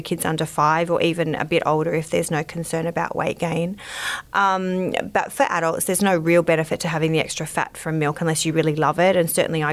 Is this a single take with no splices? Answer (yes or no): yes